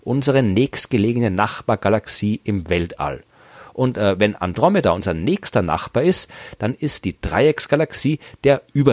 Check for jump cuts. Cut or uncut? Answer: uncut